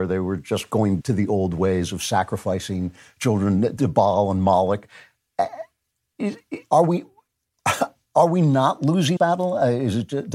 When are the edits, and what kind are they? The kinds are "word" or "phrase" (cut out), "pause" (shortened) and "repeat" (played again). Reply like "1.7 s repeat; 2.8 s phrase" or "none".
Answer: 1.0 s word; 3.8 s word; 9.2 s word

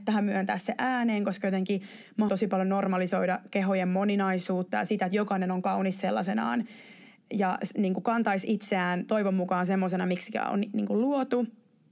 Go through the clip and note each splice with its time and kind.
2.3 s word

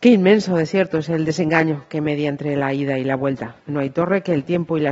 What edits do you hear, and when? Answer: 3.6 s pause

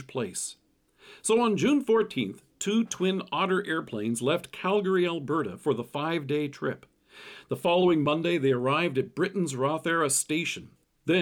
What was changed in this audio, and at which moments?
none

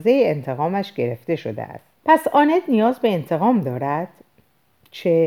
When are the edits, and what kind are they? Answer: 2.0 s pause

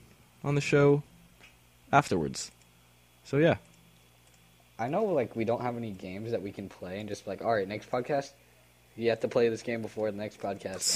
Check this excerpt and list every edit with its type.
none

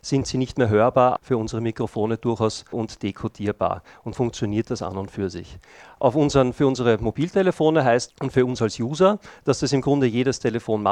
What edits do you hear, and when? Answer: 1.2 s word; 2.7 s word; 4.1 s word; 8.1 s word

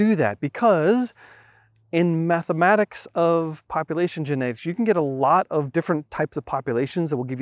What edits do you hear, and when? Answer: none

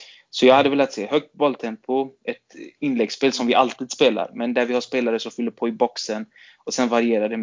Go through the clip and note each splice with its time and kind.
none

